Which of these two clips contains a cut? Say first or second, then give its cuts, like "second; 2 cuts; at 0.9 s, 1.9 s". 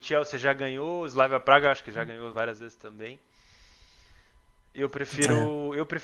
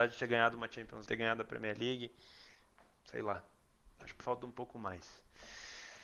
second; 2 cuts; at 1.1 s, 4.2 s